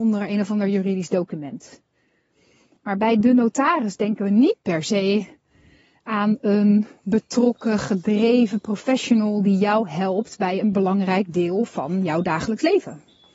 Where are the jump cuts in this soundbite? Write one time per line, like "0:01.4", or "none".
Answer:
none